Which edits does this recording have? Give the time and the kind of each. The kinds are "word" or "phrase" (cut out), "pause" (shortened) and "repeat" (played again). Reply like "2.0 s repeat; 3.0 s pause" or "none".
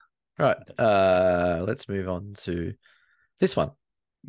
none